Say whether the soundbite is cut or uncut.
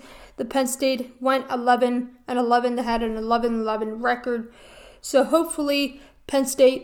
uncut